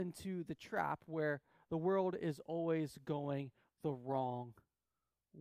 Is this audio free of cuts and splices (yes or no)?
yes